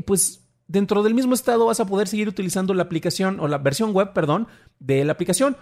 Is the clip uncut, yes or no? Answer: yes